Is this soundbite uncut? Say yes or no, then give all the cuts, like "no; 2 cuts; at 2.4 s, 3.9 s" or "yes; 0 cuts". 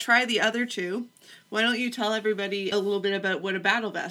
no; 1 cut; at 2.7 s